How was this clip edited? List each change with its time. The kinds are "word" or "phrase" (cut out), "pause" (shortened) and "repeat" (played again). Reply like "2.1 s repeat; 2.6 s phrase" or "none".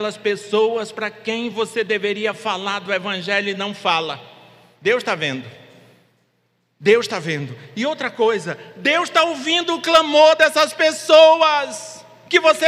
none